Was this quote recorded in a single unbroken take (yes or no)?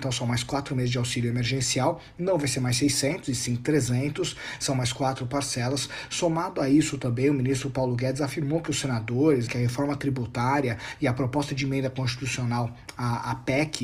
no